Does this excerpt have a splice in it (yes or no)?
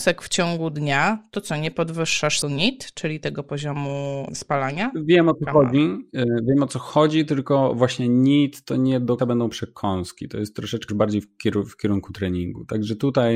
yes